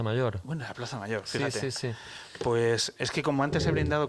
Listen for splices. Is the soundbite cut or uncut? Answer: uncut